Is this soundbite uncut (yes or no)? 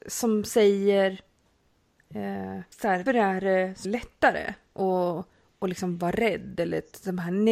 no